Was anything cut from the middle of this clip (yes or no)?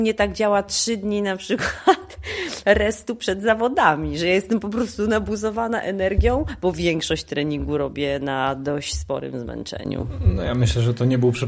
no